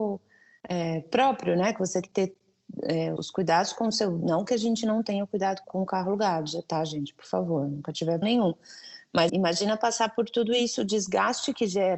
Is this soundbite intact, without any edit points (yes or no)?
no